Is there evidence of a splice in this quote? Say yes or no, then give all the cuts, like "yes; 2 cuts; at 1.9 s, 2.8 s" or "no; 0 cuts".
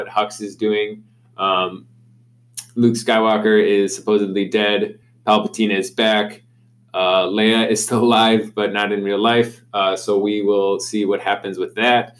no; 0 cuts